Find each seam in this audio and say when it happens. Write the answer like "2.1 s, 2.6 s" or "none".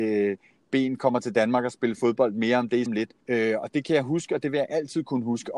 2.9 s, 3.2 s